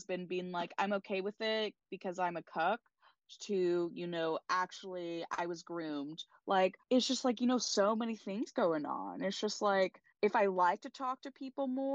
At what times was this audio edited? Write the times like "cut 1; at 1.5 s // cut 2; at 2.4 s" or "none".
cut 1; at 6.8 s // cut 2; at 10.1 s